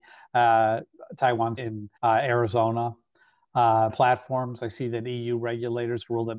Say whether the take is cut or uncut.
cut